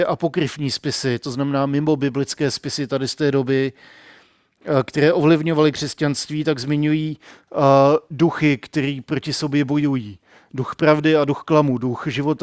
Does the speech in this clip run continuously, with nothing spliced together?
yes; 0 cuts

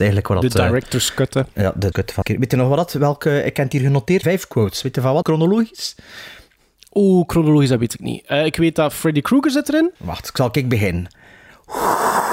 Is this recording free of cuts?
no; 6 cuts; at 1.5 s, 1.9 s, 2.2 s, 4.2 s, 5.2 s, 10.0 s

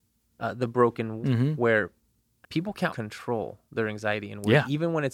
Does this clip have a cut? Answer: yes; 3 cuts; at 1.2 s, 2.4 s, 2.9 s

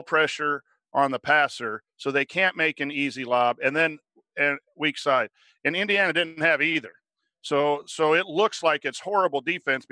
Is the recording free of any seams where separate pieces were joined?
yes; 0 cuts

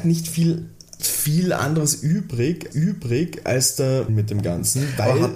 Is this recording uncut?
no; 3 cuts; at 1.0 s, 2.7 s, 4.1 s

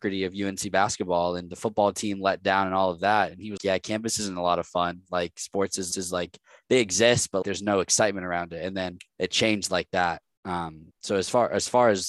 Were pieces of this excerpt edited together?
yes; 5 cuts; at 3.6 s, 5.9 s, 7.4 s, 9.1 s, 10.9 s

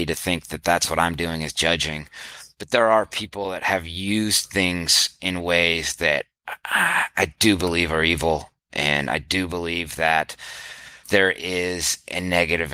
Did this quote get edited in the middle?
yes; 1 cut; at 11.0 s

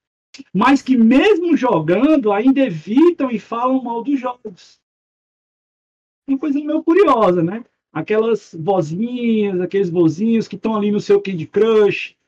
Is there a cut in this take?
no; 0 cuts

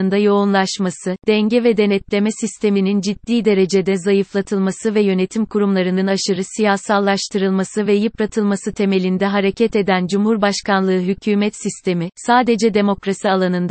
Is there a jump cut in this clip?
no; 0 cuts

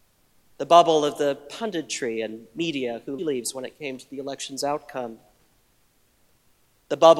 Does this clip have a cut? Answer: yes; 1 cut; at 3.2 s

